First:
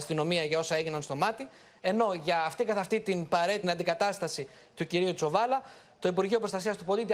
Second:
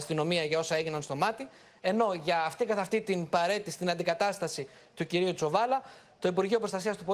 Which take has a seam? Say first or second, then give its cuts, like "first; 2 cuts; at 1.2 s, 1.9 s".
first; 1 cut; at 3.6 s